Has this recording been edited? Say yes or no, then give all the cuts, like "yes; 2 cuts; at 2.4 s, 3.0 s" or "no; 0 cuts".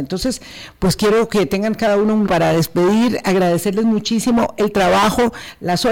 yes; 1 cut; at 2.3 s